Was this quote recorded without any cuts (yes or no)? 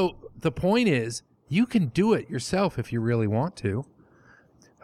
yes